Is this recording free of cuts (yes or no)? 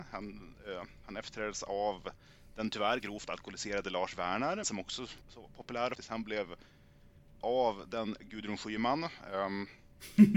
no